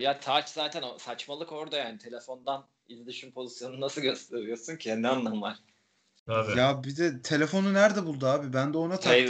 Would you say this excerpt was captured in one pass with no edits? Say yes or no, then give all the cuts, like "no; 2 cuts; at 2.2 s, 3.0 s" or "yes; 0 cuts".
yes; 0 cuts